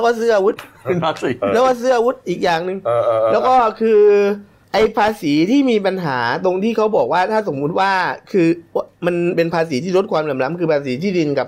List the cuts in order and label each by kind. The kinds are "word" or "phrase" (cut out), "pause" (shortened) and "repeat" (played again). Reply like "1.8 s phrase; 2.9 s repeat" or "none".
4.6 s pause